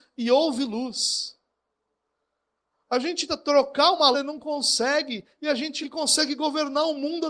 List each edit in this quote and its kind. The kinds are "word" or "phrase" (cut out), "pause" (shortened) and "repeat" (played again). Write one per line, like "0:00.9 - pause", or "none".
0:03.3 - word
0:04.1 - word
0:05.8 - word

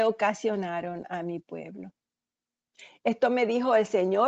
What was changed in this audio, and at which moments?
none

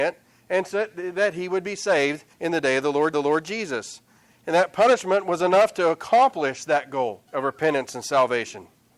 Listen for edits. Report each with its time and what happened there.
0:02.3 - pause
0:03.1 - repeat
0:07.3 - pause

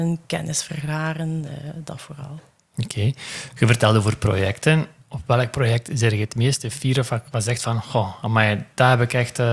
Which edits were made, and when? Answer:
none

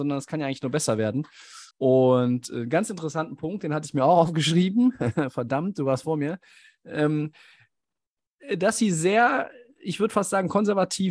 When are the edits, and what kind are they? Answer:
0:01.7 - pause

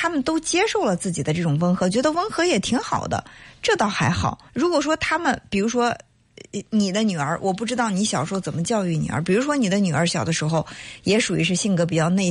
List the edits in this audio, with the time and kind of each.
0:04.5 - pause
0:06.7 - pause

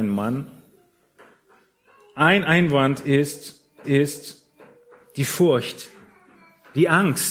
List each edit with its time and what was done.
0:03.8 - repeat

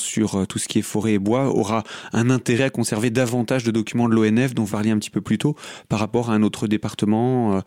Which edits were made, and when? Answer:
0:04.7 - word

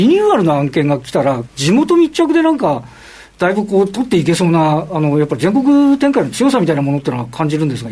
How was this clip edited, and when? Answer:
0:01.4 - phrase

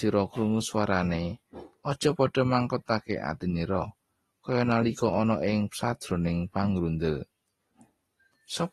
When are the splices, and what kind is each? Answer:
none

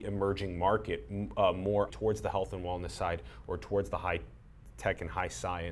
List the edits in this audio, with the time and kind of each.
0:01.9 - word

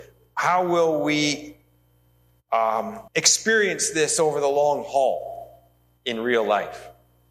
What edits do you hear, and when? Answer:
0:03.1 - pause

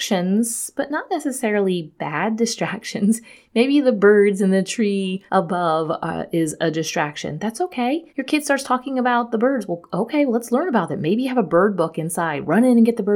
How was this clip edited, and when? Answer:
0:05.3 - pause
0:08.1 - pause

